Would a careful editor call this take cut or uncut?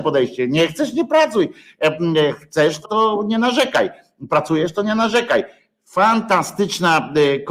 cut